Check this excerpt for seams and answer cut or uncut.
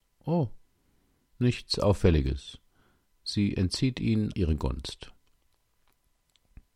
cut